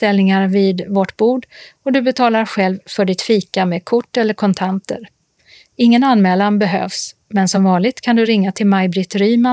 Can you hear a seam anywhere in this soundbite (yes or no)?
no